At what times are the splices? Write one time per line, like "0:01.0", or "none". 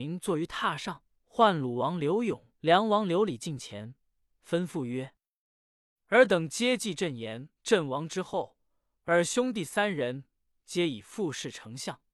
0:01.1
0:02.6
0:07.5

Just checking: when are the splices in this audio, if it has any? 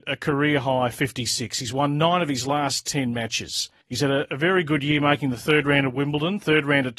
0:03.8

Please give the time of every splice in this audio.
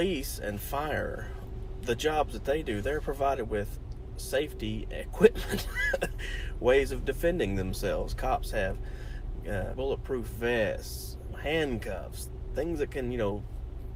0:09.7
0:11.3

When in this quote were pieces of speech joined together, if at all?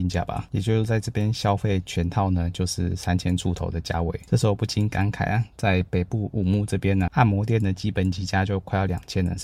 0:07.1

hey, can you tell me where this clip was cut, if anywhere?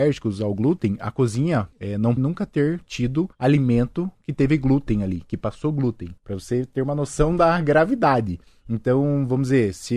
0:01.7
0:02.2
0:03.3
0:06.2
0:08.4

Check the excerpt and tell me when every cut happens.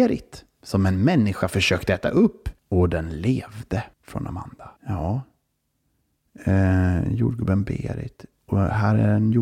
0:02.6
0:03.9
0:04.8

